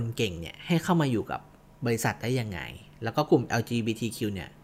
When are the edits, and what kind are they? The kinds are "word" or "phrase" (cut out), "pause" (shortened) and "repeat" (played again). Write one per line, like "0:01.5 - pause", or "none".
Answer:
none